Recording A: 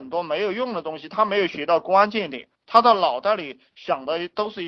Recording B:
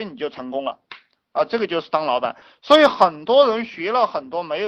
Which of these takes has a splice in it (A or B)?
A